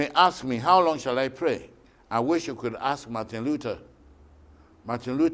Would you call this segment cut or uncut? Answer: cut